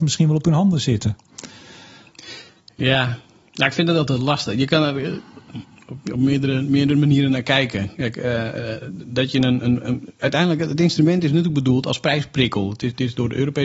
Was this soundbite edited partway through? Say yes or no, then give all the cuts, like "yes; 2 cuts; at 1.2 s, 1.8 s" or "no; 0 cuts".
no; 0 cuts